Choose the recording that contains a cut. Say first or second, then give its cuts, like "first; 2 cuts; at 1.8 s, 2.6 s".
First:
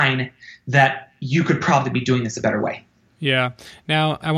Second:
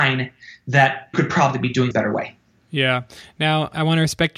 second; 2 cuts; at 1.1 s, 1.9 s